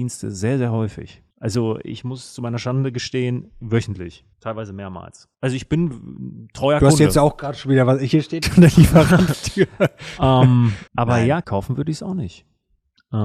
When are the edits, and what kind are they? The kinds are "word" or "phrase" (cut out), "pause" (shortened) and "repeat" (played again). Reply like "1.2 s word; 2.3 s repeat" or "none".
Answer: 1.3 s pause; 4.3 s pause; 5.3 s pause; 8.4 s word; 9.3 s phrase; 10.9 s pause; 11.4 s word